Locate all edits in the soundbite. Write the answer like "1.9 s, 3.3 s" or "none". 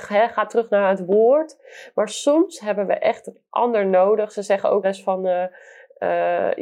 4.8 s